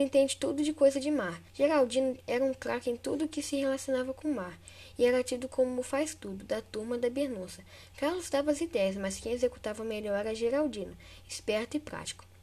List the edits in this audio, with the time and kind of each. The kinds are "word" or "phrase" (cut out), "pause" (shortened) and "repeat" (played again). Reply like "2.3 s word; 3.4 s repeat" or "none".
1.5 s pause